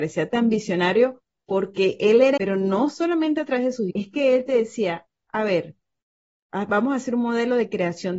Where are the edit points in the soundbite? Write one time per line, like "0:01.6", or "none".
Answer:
0:02.4
0:03.9